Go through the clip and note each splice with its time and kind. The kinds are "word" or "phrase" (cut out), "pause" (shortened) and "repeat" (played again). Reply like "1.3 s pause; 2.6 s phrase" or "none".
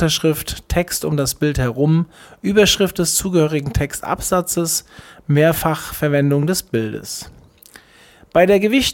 none